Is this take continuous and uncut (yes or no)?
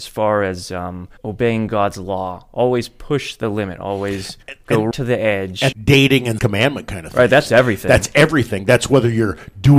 no